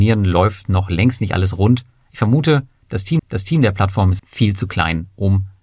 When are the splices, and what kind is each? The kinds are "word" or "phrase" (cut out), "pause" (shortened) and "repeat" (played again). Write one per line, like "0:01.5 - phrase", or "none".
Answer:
0:03.2 - repeat
0:04.2 - word